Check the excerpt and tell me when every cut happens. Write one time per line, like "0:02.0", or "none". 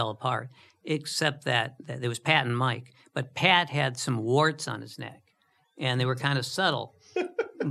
none

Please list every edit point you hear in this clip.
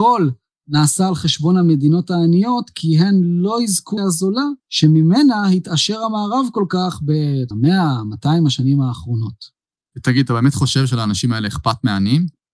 0:04.0
0:04.6
0:07.5
0:09.7

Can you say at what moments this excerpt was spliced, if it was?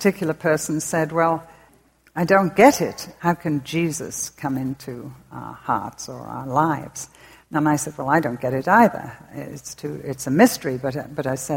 none

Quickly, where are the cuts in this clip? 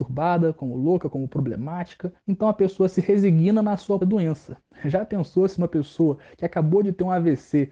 0:02.2
0:04.0

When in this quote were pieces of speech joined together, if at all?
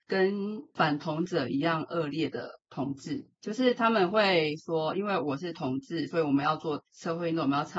0:02.6

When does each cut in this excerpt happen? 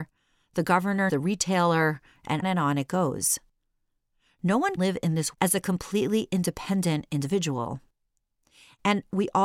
0:01.1
0:02.4
0:04.8
0:05.3

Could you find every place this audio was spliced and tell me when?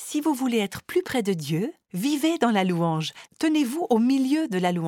0:01.8

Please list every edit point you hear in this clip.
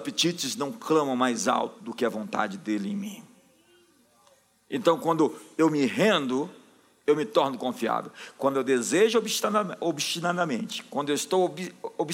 none

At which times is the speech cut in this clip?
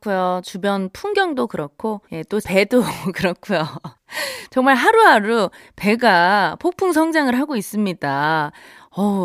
0:02.0
0:02.4
0:03.9

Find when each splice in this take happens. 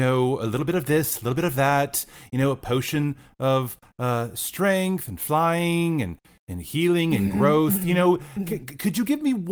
none

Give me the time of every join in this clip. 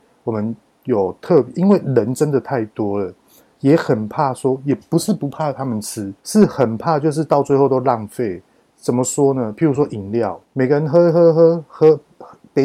0:06.2
0:10.4

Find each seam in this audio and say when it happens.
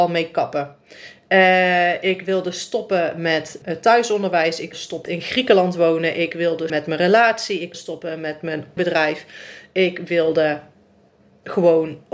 0:03.6
0:04.7
0:05.1
0:06.7
0:07.7
0:08.8

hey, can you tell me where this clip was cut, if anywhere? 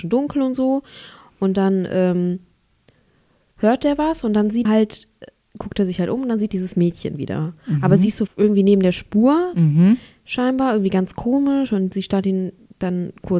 0:04.7
0:06.5
0:08.3

